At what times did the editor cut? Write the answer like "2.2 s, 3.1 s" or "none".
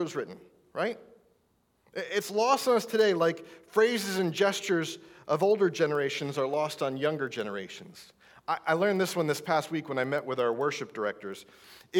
none